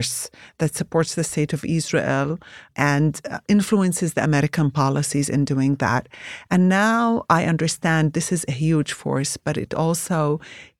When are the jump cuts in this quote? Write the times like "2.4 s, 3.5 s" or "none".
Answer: none

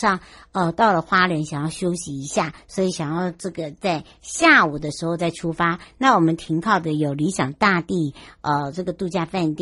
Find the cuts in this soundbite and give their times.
none

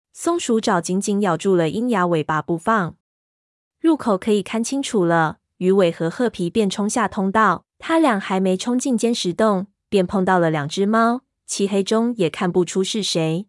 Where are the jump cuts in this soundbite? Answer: 7.7 s

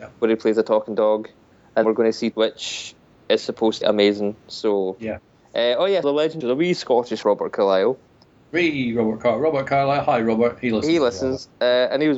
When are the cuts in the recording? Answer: 1.8 s, 2.3 s, 3.8 s, 6.0 s, 6.4 s, 7.2 s

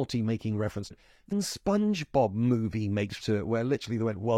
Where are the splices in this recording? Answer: 0.9 s, 1.3 s, 3.2 s

